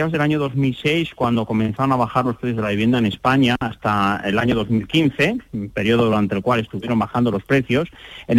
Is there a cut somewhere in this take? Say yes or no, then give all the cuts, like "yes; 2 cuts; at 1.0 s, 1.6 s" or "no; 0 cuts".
no; 0 cuts